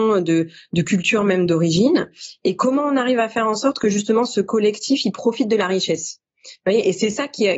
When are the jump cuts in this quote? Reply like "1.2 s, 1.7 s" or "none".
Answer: none

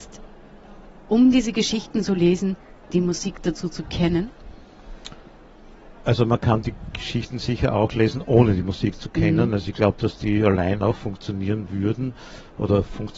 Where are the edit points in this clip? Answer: 2.8 s

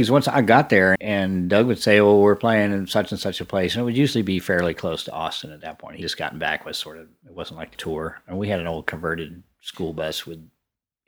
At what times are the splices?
1.0 s, 6.0 s, 7.7 s

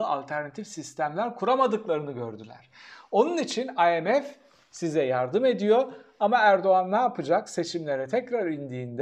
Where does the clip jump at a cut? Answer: none

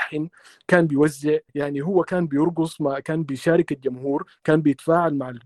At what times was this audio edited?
1.5 s

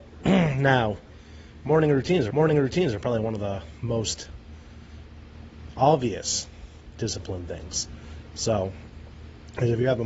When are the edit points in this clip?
2.3 s

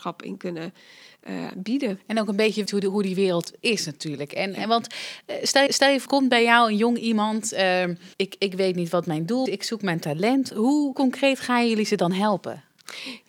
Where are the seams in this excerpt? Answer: 2.7 s, 5.7 s, 6.1 s, 8.1 s, 9.5 s

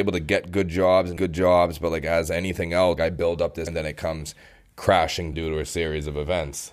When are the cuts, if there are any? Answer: 1.2 s, 3.0 s, 3.7 s, 5.3 s

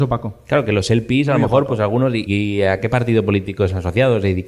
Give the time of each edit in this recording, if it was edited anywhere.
2.3 s

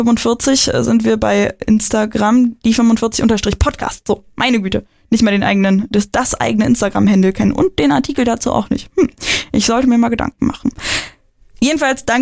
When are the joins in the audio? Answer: none

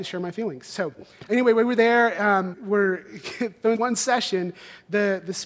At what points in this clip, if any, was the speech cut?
1.3 s, 2.5 s, 3.7 s

